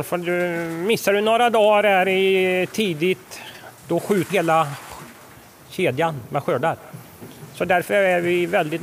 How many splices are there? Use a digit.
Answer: 2